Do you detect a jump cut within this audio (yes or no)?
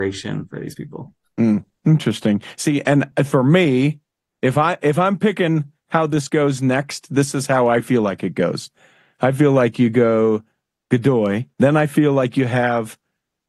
no